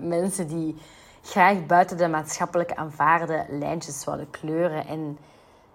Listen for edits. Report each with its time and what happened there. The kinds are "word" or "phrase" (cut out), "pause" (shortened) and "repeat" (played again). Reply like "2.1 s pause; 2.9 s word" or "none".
none